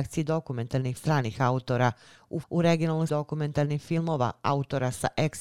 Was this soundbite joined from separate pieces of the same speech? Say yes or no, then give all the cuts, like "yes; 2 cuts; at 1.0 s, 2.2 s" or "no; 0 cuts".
yes; 3 cuts; at 1.0 s, 2.4 s, 3.1 s